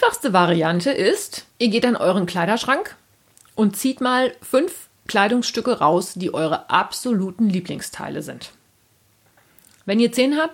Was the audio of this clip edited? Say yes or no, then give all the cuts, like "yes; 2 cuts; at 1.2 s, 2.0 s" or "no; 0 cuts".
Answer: yes; 1 cut; at 1.5 s